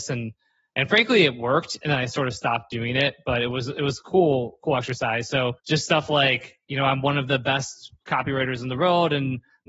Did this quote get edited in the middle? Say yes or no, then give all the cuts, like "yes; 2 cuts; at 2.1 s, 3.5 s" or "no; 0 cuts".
yes; 2 cuts; at 5.6 s, 8.0 s